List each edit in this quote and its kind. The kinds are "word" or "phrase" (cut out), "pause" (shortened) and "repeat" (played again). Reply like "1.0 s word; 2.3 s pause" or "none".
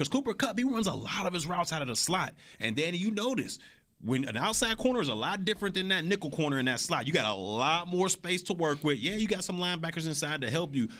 none